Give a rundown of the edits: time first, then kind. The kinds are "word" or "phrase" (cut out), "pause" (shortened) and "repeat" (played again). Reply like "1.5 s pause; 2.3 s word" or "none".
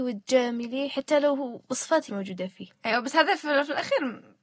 2.1 s word; 2.8 s pause